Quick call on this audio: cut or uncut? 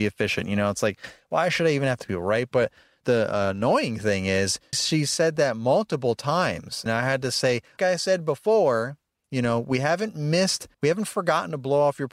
cut